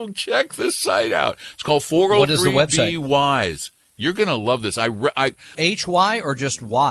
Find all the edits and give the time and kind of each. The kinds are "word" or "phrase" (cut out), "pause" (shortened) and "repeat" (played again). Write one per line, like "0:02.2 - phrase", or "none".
0:05.5 - phrase